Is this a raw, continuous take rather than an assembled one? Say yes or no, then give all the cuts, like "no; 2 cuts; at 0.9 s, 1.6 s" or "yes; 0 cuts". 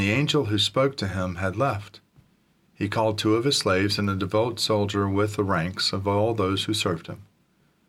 yes; 0 cuts